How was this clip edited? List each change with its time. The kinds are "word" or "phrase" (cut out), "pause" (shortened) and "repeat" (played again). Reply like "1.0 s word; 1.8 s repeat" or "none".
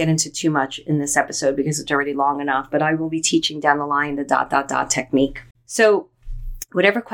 5.5 s pause